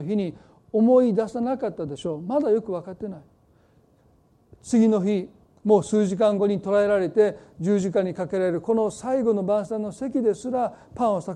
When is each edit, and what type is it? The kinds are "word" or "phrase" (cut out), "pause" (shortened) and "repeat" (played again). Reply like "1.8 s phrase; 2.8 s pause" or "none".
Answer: none